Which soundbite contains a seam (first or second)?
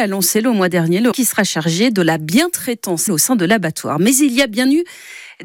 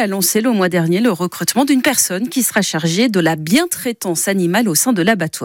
first